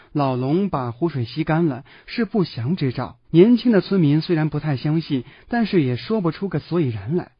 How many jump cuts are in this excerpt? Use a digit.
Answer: 1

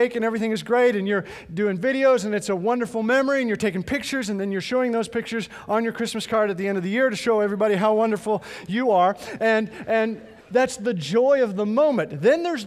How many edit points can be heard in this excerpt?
1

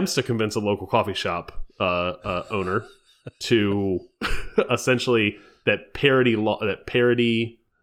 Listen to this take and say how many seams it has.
0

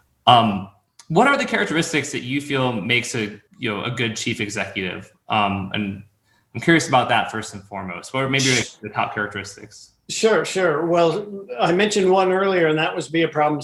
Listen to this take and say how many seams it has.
1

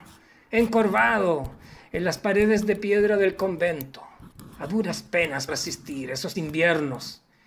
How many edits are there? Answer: 3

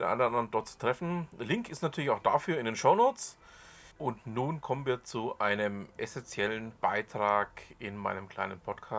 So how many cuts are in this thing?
2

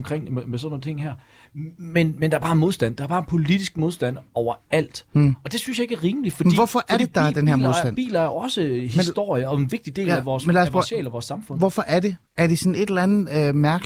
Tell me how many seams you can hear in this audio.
0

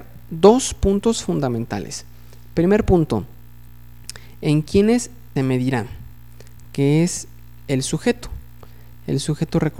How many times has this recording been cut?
1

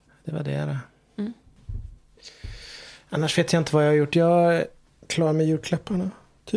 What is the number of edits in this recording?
0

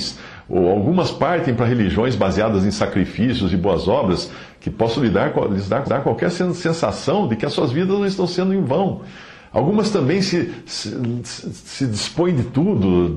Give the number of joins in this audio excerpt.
1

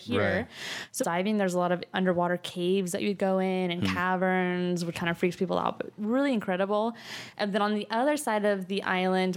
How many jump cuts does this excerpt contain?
3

